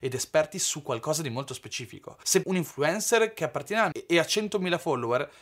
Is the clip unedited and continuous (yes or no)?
no